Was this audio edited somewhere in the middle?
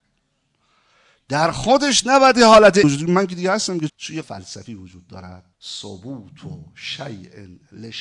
yes; 4 cuts; at 2.8 s, 3.9 s, 4.2 s, 5.5 s

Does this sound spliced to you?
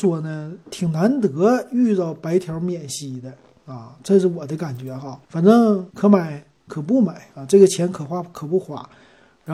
yes; 3 cuts; at 5.2 s, 5.9 s, 7.3 s

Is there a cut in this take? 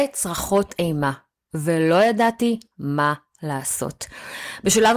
no; 0 cuts

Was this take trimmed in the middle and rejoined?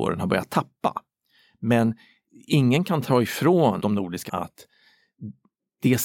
yes; 2 cuts; at 3.8 s, 4.3 s

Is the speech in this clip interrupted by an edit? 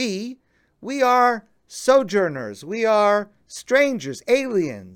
no; 0 cuts

